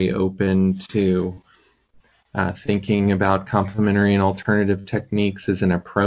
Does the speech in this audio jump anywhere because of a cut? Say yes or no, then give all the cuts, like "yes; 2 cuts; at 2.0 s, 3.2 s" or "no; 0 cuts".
no; 0 cuts